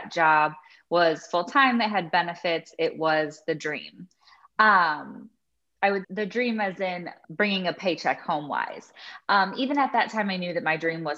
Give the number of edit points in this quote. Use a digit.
2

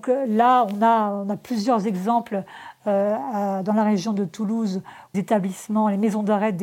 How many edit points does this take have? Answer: 1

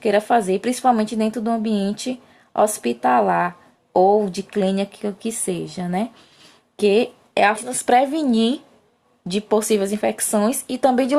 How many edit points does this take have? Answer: 1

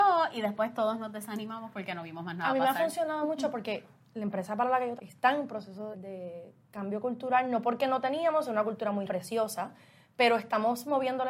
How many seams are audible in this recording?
3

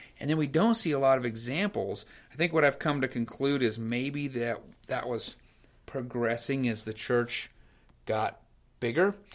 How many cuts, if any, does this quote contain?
0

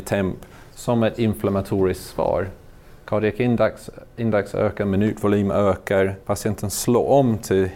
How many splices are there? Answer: 1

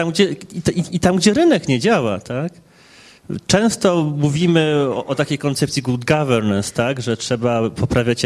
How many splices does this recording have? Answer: 0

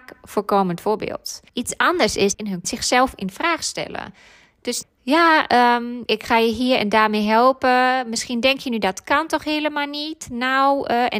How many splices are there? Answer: 5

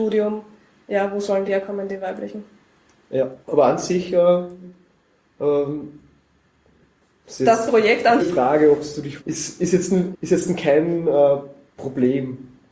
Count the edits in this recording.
6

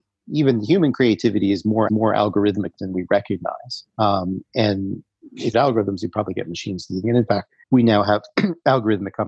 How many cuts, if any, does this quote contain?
5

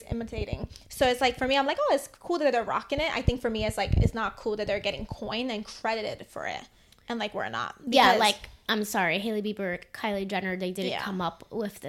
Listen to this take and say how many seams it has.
0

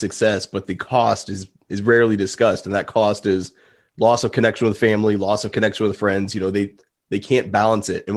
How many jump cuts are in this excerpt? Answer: 0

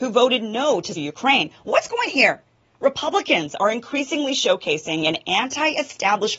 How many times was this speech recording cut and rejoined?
2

